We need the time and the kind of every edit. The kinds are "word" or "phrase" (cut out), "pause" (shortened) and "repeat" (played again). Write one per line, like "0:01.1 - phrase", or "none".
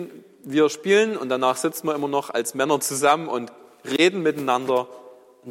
none